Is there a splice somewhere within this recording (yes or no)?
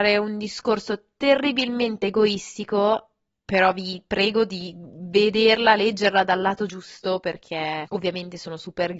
no